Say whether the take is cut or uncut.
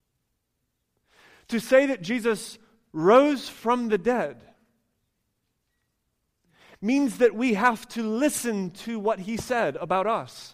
uncut